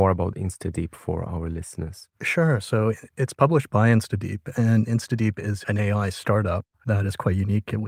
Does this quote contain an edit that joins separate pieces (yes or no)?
no